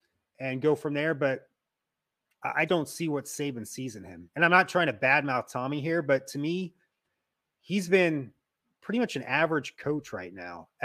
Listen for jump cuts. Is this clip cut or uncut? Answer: cut